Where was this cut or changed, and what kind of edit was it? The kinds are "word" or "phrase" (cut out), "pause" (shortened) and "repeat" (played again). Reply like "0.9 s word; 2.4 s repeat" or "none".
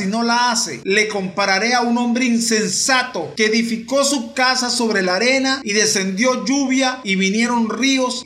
none